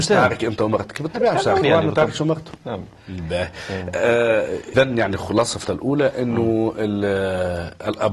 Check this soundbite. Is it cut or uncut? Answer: cut